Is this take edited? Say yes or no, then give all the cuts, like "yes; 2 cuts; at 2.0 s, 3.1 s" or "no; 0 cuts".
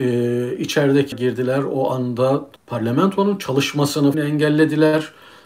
yes; 3 cuts; at 1.1 s, 2.6 s, 4.1 s